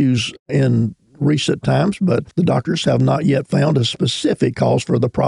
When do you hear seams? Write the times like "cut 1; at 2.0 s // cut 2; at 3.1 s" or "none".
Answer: cut 1; at 2.3 s